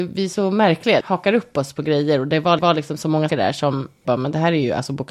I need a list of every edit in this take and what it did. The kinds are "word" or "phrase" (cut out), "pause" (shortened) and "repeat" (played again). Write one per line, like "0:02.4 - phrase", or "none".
0:01.0 - word
0:02.6 - repeat
0:03.3 - word
0:04.0 - word

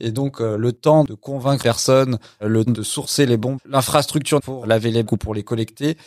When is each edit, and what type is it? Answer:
0:01.6 - word
0:02.7 - word
0:03.6 - word
0:04.4 - word
0:05.1 - word

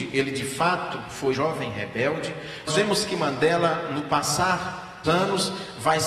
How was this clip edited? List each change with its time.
0:01.3 - word
0:02.7 - word
0:05.1 - word

